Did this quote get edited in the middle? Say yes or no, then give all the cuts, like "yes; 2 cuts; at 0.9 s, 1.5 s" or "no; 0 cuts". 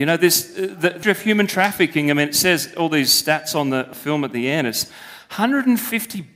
yes; 2 cuts; at 1.0 s, 3.9 s